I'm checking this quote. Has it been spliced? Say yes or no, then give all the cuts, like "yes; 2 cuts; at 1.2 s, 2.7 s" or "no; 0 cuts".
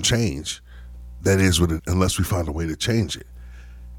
yes; 1 cut; at 1.8 s